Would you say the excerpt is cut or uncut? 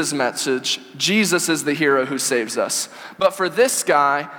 uncut